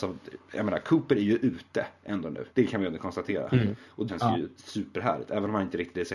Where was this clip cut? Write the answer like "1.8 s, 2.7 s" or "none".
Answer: 2.5 s, 4.1 s